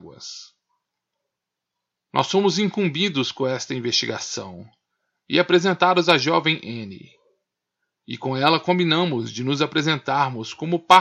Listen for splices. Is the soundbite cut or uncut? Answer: uncut